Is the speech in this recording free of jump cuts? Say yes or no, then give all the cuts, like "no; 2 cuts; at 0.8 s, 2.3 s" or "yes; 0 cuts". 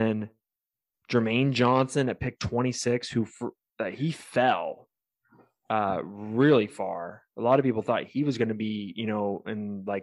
yes; 0 cuts